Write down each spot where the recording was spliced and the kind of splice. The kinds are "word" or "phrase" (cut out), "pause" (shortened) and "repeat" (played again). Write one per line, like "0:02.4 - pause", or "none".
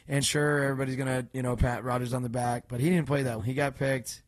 0:03.4 - word